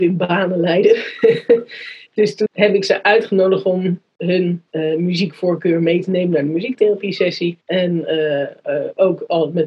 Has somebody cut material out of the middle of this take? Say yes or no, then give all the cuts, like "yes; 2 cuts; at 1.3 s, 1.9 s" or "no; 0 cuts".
yes; 3 cuts; at 2.5 s, 4.7 s, 7.6 s